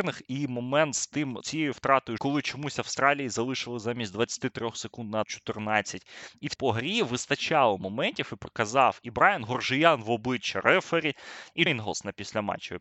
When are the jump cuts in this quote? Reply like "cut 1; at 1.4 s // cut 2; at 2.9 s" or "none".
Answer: cut 1; at 1.4 s // cut 2; at 2.2 s // cut 3; at 5.2 s // cut 4; at 6.5 s // cut 5; at 11.7 s